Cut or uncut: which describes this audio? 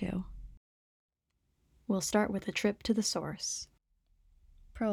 uncut